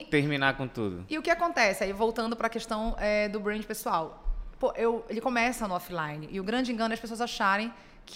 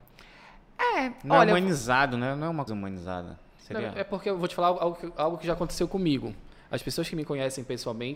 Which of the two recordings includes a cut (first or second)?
second